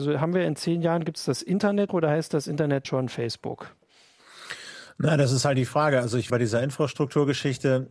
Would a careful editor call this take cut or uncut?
cut